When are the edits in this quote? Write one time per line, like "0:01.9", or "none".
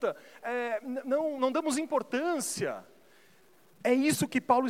0:01.4